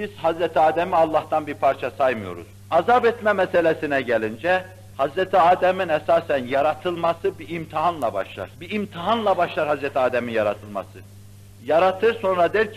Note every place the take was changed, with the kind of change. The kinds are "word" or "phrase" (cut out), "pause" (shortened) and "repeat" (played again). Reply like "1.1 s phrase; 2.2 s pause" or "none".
2.5 s pause; 4.9 s pause; 8.5 s pause